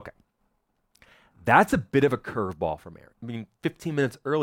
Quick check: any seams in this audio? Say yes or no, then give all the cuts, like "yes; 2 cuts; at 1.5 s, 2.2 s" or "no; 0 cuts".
yes; 1 cut; at 3.1 s